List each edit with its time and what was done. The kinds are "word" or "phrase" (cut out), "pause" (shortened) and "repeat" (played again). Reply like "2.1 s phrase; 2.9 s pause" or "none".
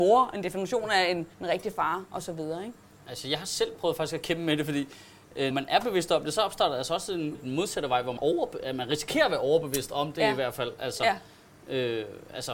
1.3 s pause; 2.8 s pause; 5.5 s word; 7.3 s word; 8.2 s word

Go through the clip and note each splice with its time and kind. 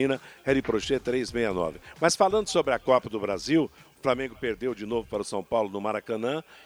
none

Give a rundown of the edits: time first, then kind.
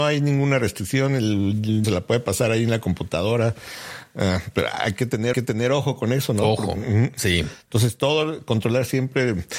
1.8 s word; 5.3 s repeat

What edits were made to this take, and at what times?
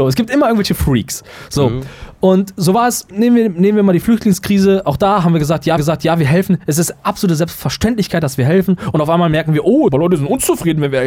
5.8 s repeat; 9.9 s phrase

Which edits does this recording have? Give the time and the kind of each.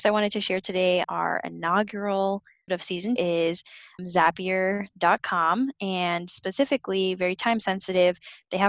1.0 s word; 2.7 s word; 3.2 s word; 4.0 s word

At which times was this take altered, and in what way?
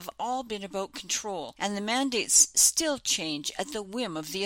none

